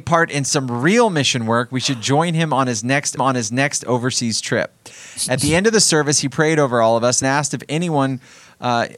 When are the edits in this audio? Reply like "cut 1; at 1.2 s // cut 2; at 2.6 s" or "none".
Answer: cut 1; at 3.2 s // cut 2; at 7.2 s